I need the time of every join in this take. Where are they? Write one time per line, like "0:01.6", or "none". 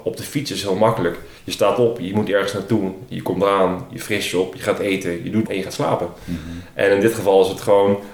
0:01.4
0:05.5